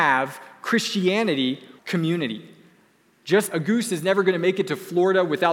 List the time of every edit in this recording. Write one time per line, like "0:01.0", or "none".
0:01.8
0:03.5

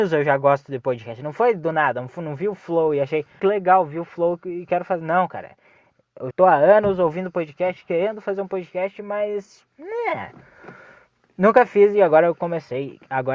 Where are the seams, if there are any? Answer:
0:03.4
0:06.3
0:09.7

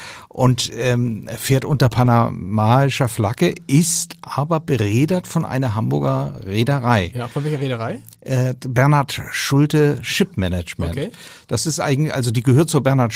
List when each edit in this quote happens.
none

